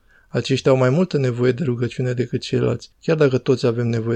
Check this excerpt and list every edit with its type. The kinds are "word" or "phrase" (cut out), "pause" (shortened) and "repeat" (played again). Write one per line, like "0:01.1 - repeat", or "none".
0:02.9 - pause